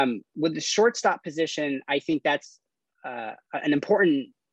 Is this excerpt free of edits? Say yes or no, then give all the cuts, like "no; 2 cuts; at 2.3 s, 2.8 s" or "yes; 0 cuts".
yes; 0 cuts